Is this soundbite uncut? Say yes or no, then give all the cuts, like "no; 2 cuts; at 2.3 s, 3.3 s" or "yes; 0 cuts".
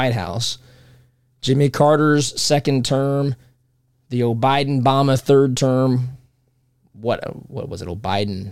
yes; 0 cuts